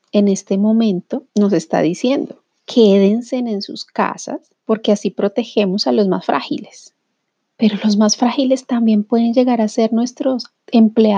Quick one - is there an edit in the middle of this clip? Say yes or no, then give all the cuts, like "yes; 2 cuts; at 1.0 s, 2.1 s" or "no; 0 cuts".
yes; 4 cuts; at 1.3 s, 2.5 s, 4.6 s, 7.4 s